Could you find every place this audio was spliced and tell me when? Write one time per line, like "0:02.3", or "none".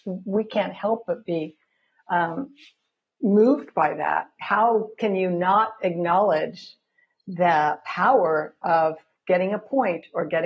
none